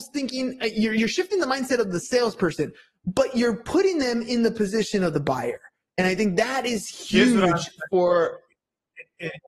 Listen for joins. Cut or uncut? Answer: uncut